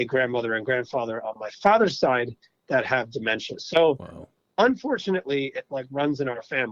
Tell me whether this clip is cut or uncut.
uncut